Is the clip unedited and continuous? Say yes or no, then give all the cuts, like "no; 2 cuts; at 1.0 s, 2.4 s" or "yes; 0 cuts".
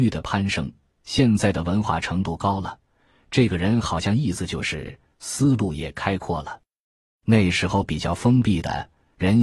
yes; 0 cuts